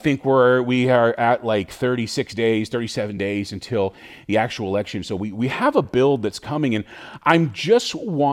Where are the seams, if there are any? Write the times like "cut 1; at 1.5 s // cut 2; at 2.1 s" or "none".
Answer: none